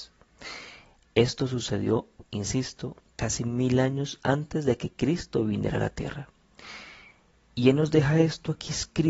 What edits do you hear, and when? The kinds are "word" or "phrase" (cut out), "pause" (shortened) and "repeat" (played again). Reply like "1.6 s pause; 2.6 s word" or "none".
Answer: none